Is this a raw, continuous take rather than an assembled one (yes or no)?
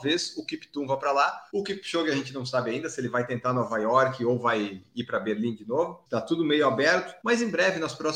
yes